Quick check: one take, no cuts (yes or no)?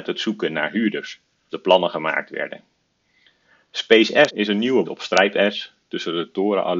no